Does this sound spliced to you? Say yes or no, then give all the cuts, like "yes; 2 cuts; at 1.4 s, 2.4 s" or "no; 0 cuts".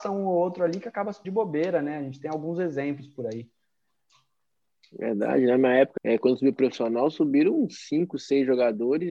yes; 2 cuts; at 1.2 s, 6.0 s